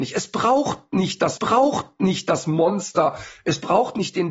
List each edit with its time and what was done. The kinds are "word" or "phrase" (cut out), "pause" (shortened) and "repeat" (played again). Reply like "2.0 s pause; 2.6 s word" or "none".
1.4 s repeat